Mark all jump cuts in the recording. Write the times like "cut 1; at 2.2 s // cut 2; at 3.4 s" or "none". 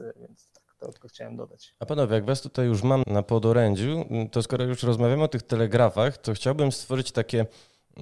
cut 1; at 3.0 s